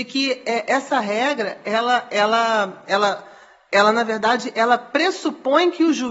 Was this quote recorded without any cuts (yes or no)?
yes